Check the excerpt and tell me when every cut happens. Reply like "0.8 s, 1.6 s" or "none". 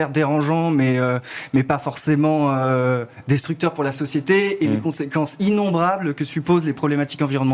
none